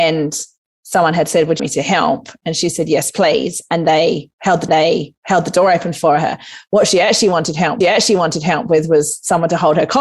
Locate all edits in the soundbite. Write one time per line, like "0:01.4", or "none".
0:01.6
0:04.7
0:07.8